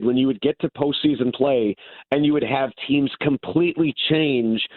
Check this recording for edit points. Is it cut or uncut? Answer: uncut